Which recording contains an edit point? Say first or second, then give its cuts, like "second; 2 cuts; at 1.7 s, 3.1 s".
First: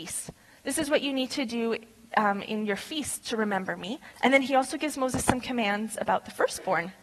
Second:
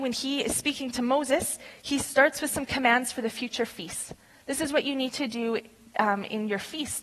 first; 1 cut; at 4.1 s